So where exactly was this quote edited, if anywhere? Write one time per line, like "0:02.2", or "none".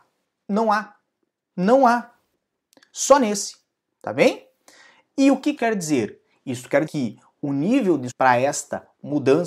0:05.6
0:06.9
0:08.1